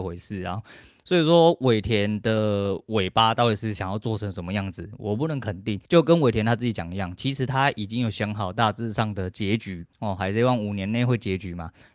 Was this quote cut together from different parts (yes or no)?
yes